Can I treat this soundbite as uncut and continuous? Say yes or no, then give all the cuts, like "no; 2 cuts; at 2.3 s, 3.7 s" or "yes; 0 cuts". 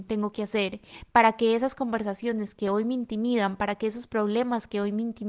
yes; 0 cuts